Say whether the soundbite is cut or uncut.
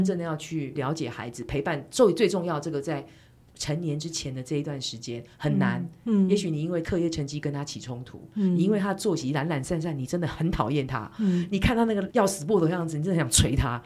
uncut